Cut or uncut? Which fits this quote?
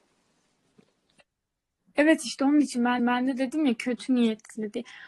cut